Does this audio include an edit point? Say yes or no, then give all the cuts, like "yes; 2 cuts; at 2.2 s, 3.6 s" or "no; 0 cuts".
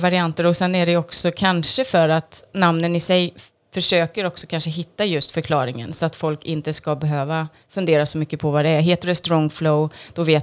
no; 0 cuts